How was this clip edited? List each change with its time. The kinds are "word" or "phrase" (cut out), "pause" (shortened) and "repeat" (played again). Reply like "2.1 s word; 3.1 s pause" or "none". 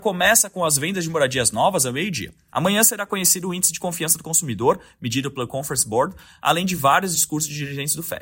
none